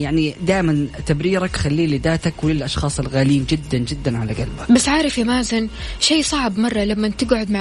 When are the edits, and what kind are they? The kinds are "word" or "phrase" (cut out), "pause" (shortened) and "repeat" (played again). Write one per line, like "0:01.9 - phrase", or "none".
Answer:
none